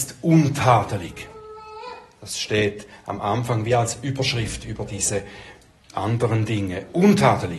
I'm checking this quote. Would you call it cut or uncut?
uncut